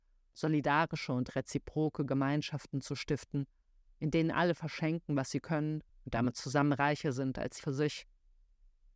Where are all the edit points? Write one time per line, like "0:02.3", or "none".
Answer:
0:05.9
0:07.6